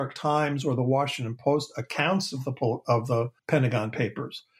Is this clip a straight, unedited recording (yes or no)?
no